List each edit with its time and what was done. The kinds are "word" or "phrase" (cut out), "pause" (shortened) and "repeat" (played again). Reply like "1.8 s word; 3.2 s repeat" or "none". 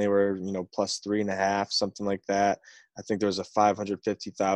none